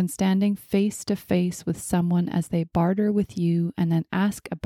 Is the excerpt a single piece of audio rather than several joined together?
yes; 0 cuts

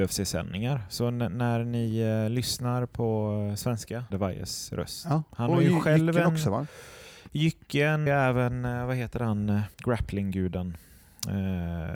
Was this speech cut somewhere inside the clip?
yes; 3 cuts; at 4.1 s, 8.1 s, 9.7 s

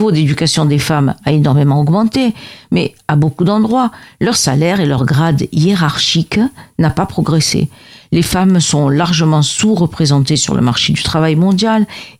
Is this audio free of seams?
yes; 0 cuts

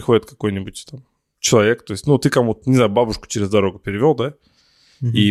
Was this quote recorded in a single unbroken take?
yes; 0 cuts

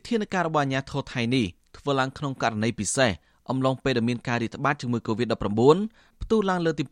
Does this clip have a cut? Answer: no; 0 cuts

